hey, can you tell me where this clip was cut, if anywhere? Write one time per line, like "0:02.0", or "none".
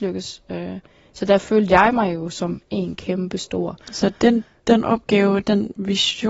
0:03.8